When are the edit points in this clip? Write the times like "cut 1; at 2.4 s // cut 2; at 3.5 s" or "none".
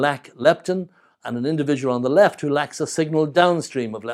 none